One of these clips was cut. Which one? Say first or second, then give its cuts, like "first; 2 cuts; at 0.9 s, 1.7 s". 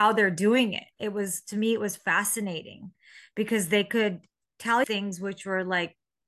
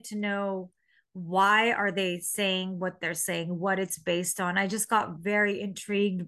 first; 2 cuts; at 0.9 s, 4.8 s